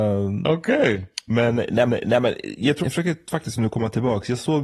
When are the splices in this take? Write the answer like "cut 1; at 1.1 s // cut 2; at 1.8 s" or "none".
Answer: cut 1; at 1.9 s // cut 2; at 2.8 s